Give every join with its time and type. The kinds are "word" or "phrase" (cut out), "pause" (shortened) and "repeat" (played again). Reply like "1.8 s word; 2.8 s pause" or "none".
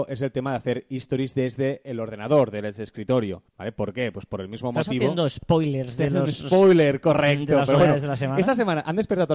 3.5 s pause

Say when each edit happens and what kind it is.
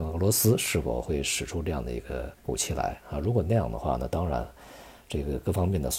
2.4 s pause

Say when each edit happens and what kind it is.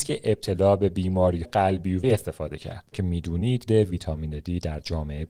1.4 s word; 2.0 s word; 2.9 s word; 3.7 s word

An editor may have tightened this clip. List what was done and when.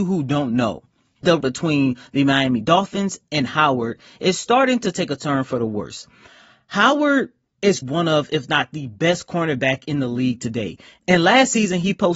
1.4 s word; 7.8 s word

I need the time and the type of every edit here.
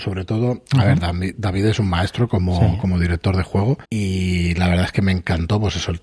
3.8 s pause

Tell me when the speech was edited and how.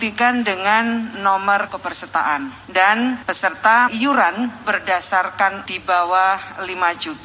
1.7 s word; 3.9 s word; 5.7 s word

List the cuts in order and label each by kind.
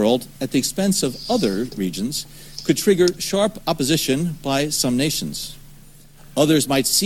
none

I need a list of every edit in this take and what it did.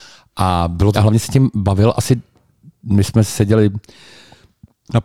0.9 s phrase

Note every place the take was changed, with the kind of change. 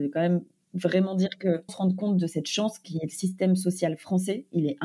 1.7 s word

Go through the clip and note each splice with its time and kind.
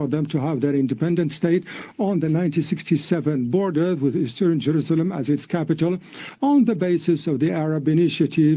none

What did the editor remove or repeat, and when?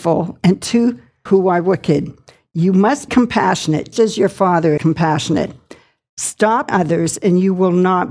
1.3 s word; 3.1 s word; 3.9 s word; 4.8 s word; 6.7 s word

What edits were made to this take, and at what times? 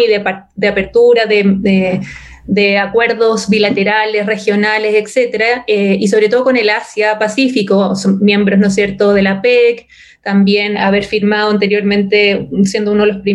10.7 s word

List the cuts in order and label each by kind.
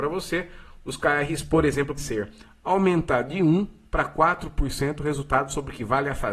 2.0 s word

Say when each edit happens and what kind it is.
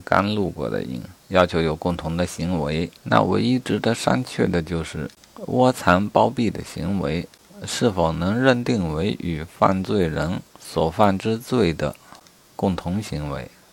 1.2 s pause; 3.0 s pause; 10.5 s pause

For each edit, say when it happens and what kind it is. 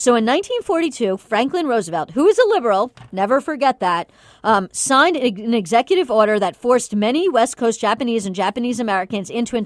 none

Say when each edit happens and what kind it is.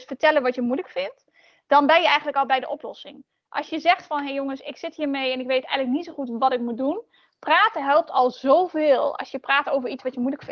2.5 s word

